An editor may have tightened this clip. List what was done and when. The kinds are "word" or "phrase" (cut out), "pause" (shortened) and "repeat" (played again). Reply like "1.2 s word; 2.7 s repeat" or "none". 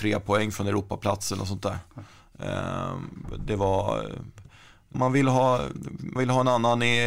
4.9 s word; 6.2 s word

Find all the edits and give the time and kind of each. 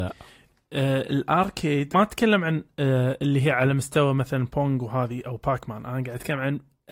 1.9 s phrase

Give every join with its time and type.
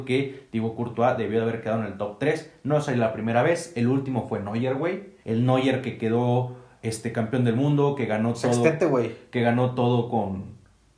5.2 s pause

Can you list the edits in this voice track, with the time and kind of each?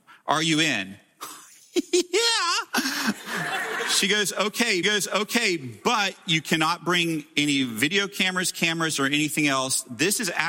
4.8 s repeat

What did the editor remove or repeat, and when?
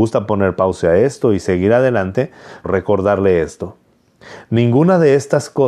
2.6 s phrase

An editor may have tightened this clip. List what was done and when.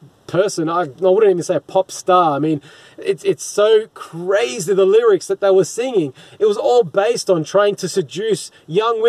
none

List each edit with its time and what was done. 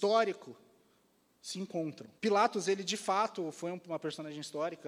2.2 s pause

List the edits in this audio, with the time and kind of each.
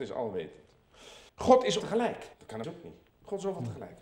1.3 s pause; 1.8 s word; 2.3 s pause; 2.6 s word; 3.1 s pause

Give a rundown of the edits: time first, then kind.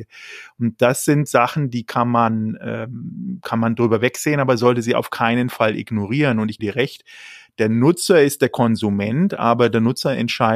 6.6 s word

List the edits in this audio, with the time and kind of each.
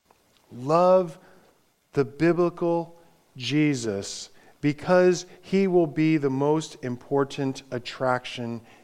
none

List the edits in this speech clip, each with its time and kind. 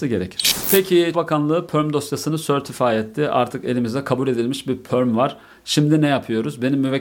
1.1 s word

